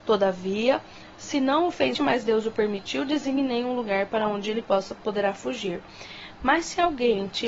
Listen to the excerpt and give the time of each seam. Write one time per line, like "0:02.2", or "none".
0:01.9